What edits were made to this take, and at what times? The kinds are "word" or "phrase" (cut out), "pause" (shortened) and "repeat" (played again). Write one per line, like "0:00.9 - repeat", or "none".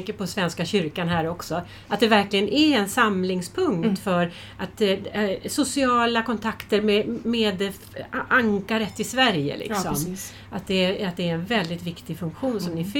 none